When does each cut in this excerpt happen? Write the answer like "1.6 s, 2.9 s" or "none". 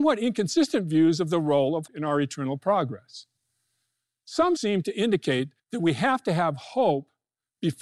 1.9 s, 4.6 s, 5.6 s

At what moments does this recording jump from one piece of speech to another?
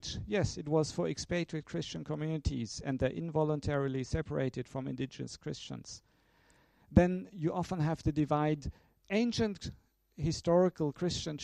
none

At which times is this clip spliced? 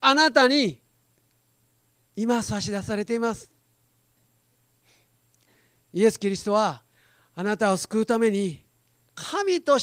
none

